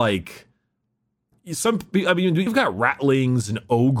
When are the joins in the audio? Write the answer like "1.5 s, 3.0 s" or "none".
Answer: 2.5 s